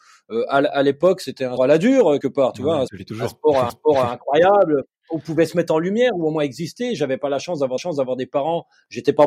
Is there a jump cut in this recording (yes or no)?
yes